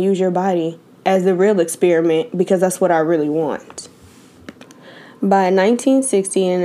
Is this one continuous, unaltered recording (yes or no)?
yes